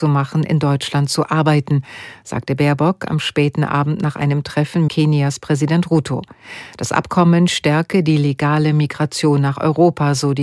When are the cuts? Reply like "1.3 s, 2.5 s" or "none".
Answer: 4.9 s